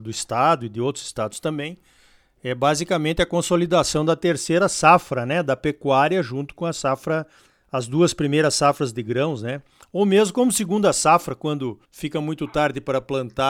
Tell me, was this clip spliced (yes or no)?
yes